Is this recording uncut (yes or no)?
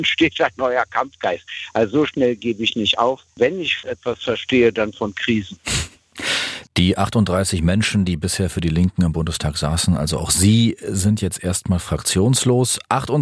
yes